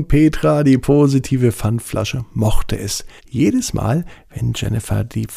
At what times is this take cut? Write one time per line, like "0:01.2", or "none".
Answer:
0:03.2